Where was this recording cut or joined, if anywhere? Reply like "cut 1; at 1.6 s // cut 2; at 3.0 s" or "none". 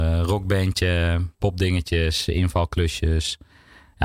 cut 1; at 1.3 s